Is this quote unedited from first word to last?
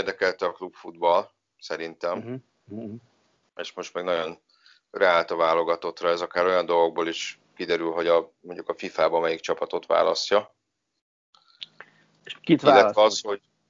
yes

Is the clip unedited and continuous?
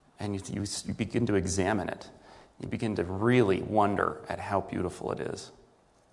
yes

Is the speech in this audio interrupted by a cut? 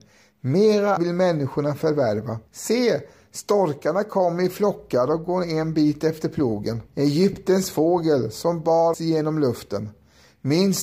yes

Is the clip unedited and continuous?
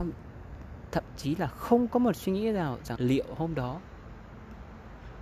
no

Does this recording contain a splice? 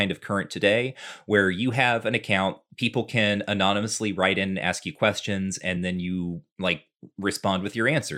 no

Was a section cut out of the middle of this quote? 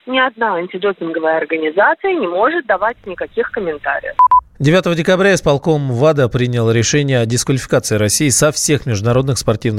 no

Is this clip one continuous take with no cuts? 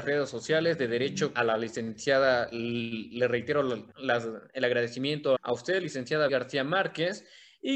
no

